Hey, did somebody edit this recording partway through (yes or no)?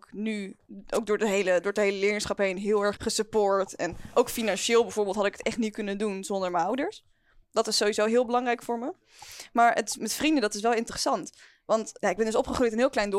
yes